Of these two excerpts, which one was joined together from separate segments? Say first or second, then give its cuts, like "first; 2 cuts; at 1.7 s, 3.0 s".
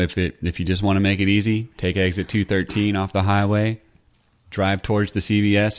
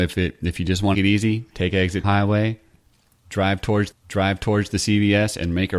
second; 3 cuts; at 0.9 s, 2.0 s, 3.9 s